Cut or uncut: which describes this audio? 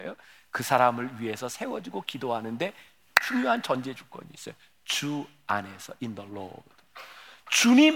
uncut